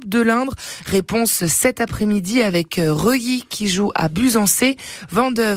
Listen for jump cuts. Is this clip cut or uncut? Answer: uncut